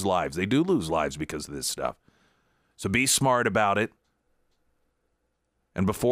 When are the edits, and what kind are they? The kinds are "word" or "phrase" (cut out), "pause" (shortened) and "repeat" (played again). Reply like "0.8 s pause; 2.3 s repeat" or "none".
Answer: none